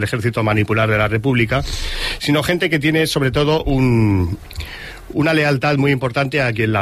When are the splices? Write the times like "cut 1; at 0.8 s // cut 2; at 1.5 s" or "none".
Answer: none